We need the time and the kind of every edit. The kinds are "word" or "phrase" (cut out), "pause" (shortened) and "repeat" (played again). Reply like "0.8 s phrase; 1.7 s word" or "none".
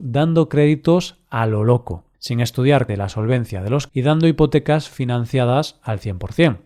2.1 s pause; 2.9 s word; 3.9 s word